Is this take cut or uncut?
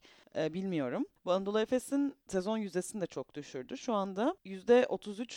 cut